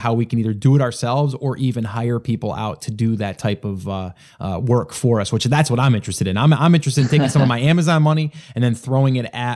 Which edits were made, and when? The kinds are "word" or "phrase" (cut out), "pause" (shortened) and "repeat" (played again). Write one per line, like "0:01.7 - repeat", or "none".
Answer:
none